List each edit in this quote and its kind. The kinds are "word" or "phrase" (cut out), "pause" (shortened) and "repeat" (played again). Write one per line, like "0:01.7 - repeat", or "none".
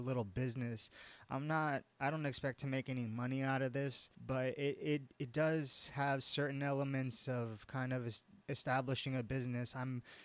0:04.1 - pause
0:08.4 - pause